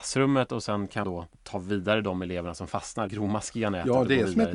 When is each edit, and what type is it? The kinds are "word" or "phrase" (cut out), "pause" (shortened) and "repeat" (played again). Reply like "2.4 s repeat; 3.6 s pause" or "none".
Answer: 1.0 s word; 1.3 s pause; 3.1 s phrase